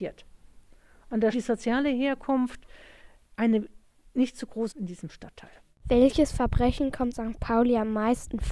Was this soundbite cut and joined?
yes; 3 cuts; at 1.3 s, 4.7 s, 7.1 s

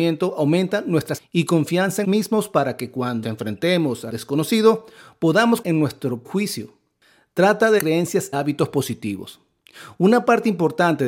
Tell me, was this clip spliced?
yes; 8 cuts; at 1.2 s, 2.0 s, 3.2 s, 4.1 s, 5.6 s, 6.2 s, 7.8 s, 8.3 s

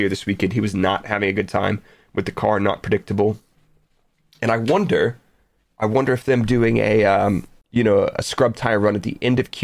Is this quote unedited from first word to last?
yes; 0 cuts

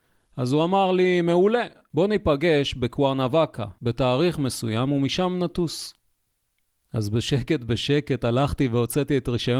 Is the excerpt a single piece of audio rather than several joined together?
yes; 0 cuts

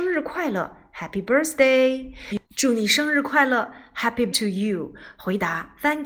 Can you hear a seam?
yes; 2 cuts; at 2.5 s, 4.3 s

